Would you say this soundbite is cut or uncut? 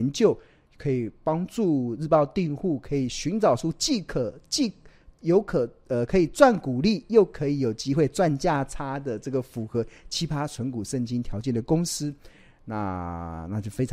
uncut